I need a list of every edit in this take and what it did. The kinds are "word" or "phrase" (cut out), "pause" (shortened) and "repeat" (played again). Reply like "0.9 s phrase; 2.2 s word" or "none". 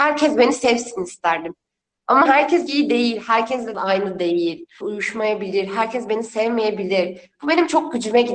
2.3 s word; 2.7 s word; 3.7 s word; 4.8 s word